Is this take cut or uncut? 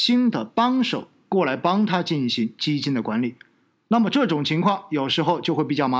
uncut